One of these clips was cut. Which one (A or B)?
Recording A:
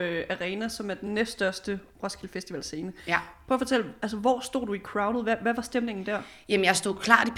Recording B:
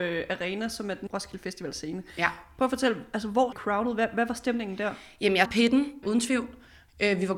B